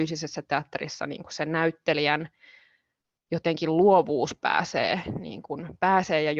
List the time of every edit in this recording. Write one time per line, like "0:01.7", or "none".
none